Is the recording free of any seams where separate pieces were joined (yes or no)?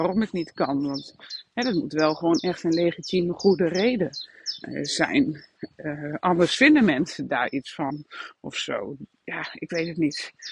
yes